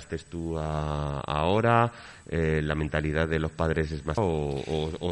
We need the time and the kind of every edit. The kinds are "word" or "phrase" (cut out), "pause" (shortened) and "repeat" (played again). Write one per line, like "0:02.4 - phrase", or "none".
0:04.2 - word